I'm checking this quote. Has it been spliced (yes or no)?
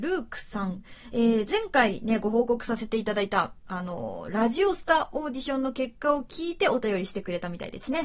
no